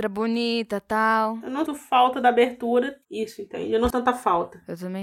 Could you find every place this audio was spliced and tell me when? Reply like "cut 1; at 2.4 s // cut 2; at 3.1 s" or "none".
cut 1; at 1.7 s // cut 2; at 3.0 s // cut 3; at 3.9 s